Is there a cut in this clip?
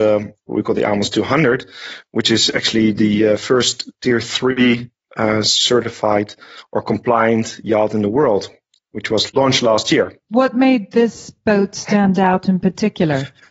no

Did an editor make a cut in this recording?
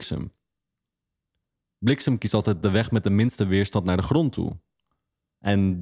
no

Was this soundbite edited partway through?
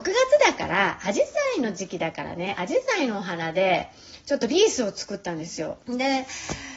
yes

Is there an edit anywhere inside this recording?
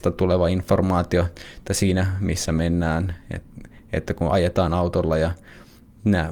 no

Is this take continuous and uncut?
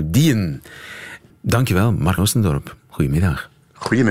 no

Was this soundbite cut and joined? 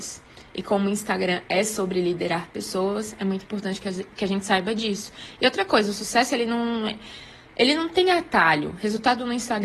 no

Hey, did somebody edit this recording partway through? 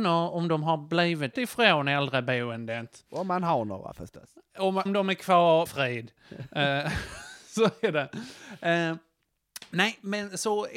yes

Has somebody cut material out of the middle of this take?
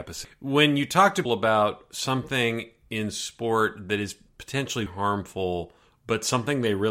yes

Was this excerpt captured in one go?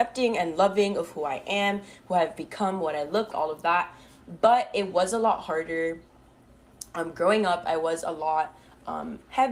no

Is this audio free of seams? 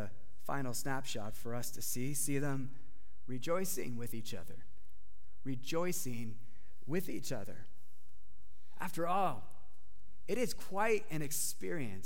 yes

